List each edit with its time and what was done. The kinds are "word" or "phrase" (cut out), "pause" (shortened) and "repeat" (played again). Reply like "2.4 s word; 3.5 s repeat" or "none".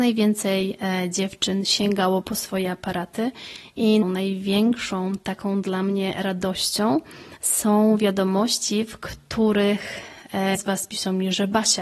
4.0 s word; 10.5 s word